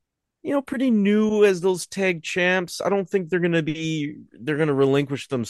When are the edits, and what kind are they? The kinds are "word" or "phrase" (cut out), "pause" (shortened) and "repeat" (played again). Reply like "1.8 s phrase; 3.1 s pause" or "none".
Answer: 4.3 s pause

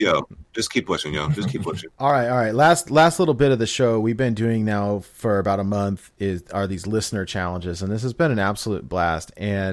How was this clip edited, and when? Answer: 1.9 s pause

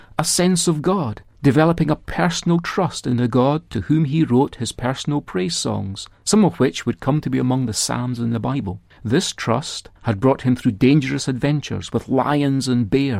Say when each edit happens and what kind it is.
1.3 s pause; 6.2 s pause; 8.9 s pause; 10.0 s pause

